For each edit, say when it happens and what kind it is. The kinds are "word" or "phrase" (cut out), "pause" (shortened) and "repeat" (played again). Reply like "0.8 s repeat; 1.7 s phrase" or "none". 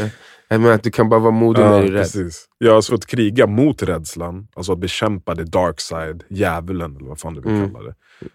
2.5 s pause; 2.9 s phrase

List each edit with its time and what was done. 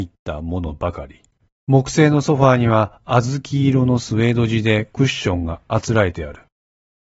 1.4 s pause

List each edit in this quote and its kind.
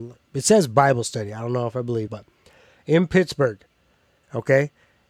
2.1 s word

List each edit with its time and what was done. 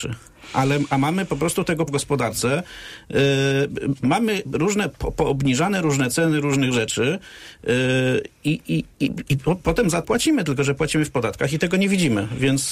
1.9 s word; 10.0 s word

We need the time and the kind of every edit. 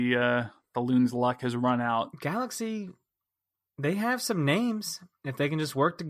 none

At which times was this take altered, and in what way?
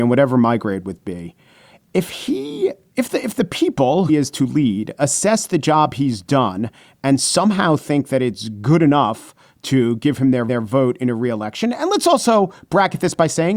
4.1 s word; 10.5 s repeat

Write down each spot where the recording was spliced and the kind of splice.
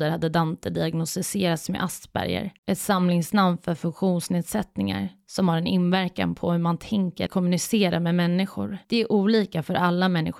2.6 s pause; 7.3 s word; 8.8 s pause

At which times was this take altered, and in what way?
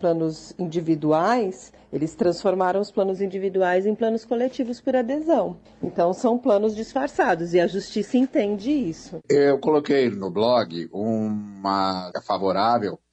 9.2 s pause; 12.1 s word

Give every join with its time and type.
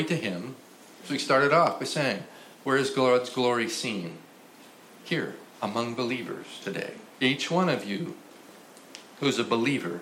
2.5 s pause; 5.5 s pause; 7.1 s pause

